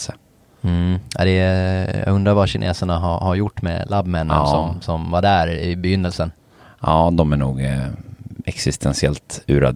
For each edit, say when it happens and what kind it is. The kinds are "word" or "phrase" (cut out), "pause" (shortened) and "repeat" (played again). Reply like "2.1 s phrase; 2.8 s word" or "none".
none